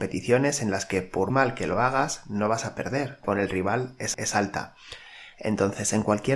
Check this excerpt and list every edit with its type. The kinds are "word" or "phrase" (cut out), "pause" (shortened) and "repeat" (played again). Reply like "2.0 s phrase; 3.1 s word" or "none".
1.3 s word; 3.2 s phrase; 4.1 s repeat